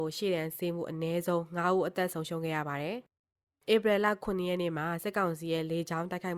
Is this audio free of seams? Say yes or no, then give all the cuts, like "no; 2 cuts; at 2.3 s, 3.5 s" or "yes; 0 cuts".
yes; 0 cuts